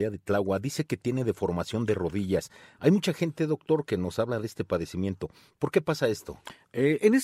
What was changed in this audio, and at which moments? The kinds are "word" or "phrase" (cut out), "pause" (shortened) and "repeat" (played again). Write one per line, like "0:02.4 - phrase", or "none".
none